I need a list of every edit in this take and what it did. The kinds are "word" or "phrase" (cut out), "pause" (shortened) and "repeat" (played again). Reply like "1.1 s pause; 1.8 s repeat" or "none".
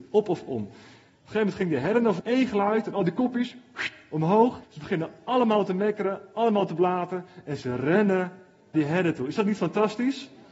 2.2 s phrase; 4.6 s pause; 8.7 s word